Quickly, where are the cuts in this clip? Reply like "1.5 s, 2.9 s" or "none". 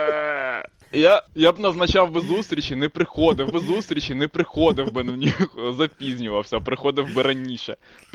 1.3 s, 3.5 s